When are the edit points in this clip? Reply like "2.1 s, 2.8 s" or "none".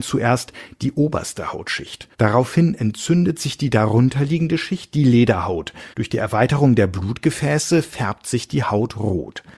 2.1 s, 5.9 s